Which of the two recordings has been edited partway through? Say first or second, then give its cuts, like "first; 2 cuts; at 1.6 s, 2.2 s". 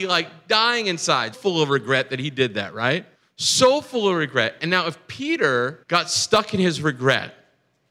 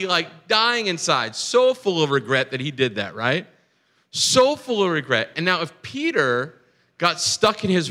first; 3 cuts; at 1.3 s, 3.1 s, 5.8 s